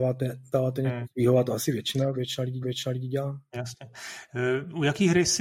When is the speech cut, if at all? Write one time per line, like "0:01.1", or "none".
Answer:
0:02.6